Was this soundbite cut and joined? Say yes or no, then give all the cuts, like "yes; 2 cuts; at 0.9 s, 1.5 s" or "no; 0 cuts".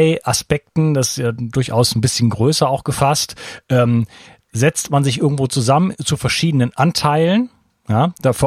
no; 0 cuts